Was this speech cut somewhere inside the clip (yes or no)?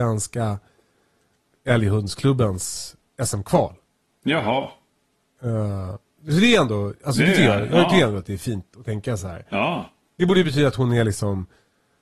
no